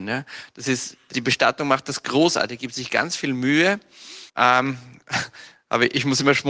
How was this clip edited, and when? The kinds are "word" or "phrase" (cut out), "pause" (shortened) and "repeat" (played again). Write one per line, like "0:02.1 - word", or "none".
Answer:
0:01.1 - word
0:04.3 - pause